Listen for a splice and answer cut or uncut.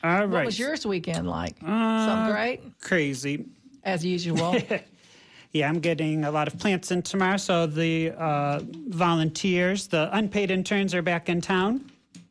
uncut